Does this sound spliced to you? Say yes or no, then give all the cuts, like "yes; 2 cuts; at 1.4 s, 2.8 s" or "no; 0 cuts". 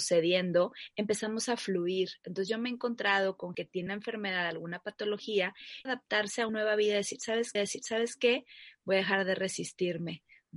yes; 5 cuts; at 3.5 s, 3.9 s, 5.9 s, 6.5 s, 7.6 s